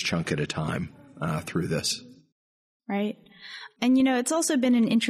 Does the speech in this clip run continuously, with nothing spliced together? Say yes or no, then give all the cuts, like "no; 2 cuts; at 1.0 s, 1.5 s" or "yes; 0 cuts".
yes; 0 cuts